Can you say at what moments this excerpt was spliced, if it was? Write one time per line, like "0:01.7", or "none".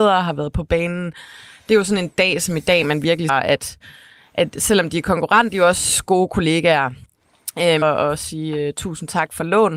0:03.3
0:05.5
0:07.8